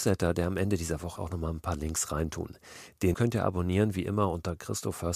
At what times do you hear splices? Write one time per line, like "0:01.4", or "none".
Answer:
0:01.2
0:03.1